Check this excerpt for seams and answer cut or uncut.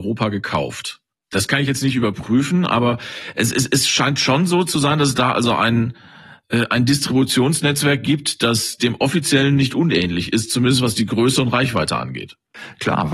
uncut